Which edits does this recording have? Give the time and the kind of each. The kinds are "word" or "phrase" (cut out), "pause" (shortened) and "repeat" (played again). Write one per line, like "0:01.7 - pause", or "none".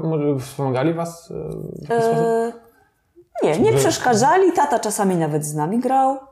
none